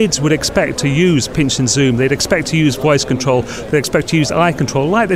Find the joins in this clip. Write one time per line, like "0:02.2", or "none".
none